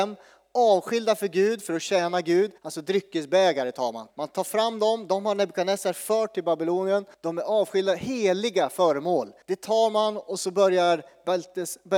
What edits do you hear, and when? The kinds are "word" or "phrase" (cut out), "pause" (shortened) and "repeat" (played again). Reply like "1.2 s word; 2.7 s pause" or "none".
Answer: 2.6 s pause; 4.1 s pause; 7.1 s pause; 9.4 s pause